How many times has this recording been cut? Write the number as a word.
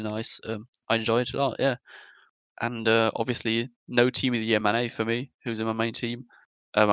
zero